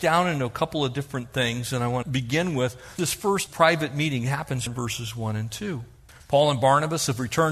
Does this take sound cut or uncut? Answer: cut